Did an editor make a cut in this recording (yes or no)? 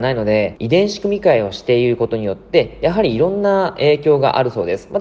no